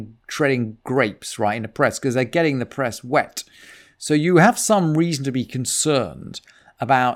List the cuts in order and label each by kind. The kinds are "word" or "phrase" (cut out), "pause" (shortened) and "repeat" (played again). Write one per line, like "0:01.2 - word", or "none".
none

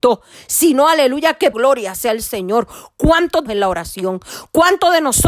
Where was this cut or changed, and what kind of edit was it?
0:01.5 - word
0:03.5 - phrase

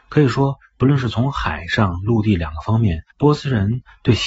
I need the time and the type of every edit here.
0:03.1 - pause

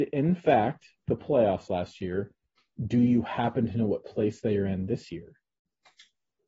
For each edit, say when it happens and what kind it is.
0:01.1 - word

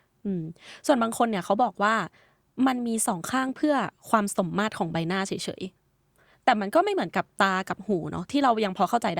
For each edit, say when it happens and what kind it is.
0:05.8 - pause

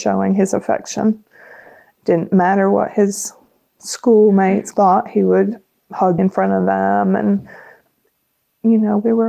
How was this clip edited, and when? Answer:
0:04.7 - word
0:06.2 - word

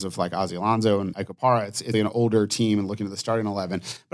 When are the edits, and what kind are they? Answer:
0:01.1 - word
0:01.9 - word

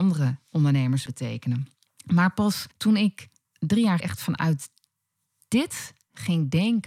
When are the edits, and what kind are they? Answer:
0:01.1 - word
0:01.9 - pause
0:02.7 - pause
0:03.4 - pause
0:04.0 - word

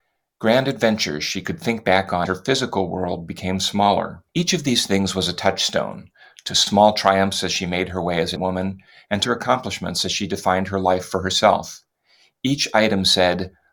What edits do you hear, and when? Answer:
0:02.3 - word
0:04.3 - pause
0:08.4 - word
0:09.2 - word

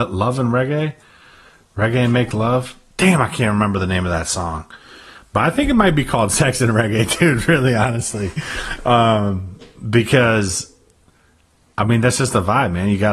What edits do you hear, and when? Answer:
none

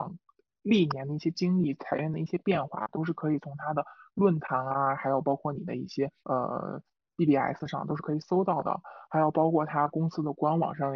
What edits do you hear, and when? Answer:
0:06.2 - pause

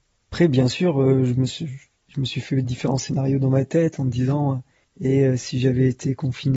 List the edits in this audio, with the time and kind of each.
none

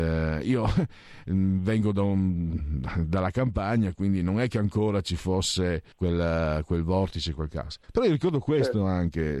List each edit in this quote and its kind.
0:05.9 - pause
0:07.8 - pause

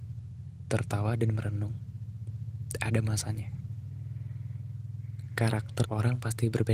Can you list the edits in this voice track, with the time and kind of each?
0:05.8 - word

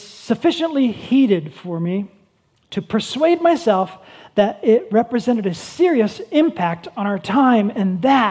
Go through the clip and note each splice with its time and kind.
none

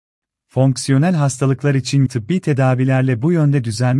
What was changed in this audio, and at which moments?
0:02.1 - word

